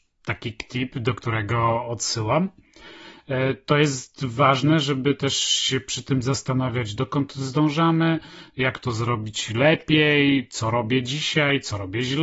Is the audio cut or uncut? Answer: uncut